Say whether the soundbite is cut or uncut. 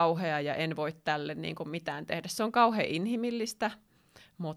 uncut